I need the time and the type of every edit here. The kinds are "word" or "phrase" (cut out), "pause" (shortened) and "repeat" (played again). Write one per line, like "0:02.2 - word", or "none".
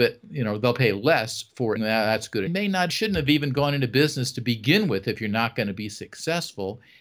0:01.8 - phrase
0:02.5 - phrase
0:02.9 - word